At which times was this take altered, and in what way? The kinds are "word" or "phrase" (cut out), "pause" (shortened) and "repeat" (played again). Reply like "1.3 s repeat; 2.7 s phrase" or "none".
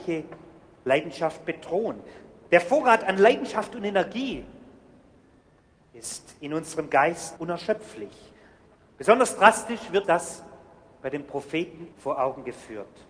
7.4 s word; 10.0 s word; 11.9 s word